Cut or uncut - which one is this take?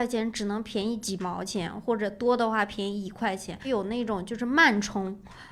uncut